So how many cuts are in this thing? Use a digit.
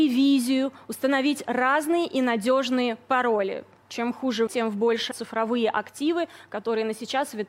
2